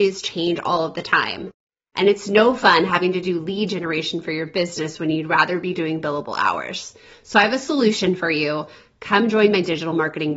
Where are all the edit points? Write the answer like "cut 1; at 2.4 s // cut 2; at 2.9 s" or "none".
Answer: none